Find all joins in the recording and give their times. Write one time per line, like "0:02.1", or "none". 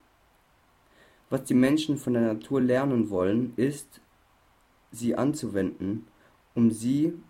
none